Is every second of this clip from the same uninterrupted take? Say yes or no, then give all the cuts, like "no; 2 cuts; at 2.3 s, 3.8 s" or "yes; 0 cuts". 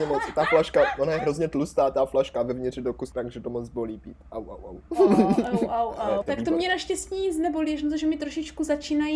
no; 2 cuts; at 3.1 s, 6.2 s